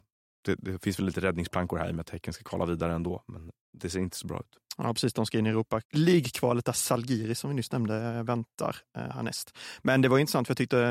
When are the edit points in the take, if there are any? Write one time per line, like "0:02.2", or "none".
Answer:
0:05.8